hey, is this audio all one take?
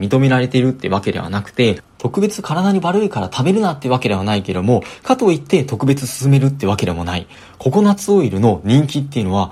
yes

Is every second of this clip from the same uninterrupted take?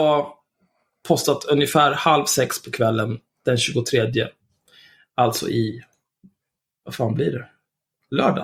yes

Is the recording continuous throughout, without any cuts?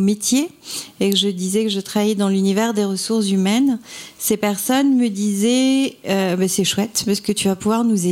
yes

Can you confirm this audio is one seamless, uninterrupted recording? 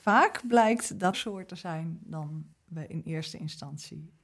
no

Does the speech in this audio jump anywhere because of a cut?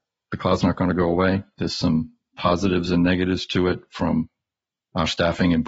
no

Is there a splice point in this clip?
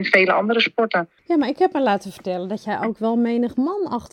yes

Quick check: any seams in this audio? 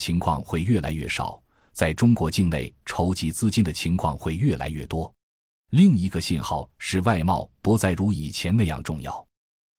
no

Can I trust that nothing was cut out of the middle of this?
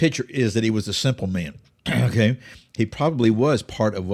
yes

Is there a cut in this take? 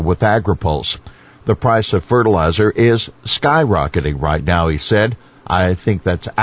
no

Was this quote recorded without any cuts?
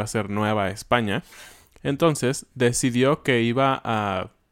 yes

